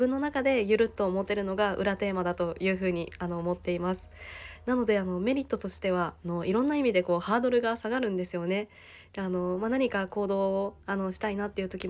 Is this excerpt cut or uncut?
uncut